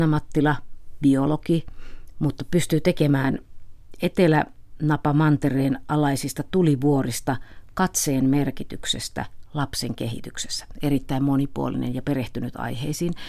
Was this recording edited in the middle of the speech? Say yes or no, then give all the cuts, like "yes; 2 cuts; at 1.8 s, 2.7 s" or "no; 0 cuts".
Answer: no; 0 cuts